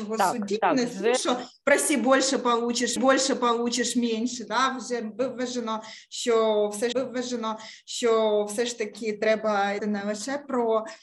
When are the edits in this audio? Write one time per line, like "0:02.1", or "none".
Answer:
0:03.0
0:06.9
0:09.8